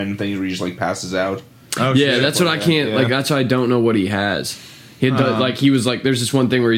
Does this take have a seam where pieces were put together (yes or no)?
no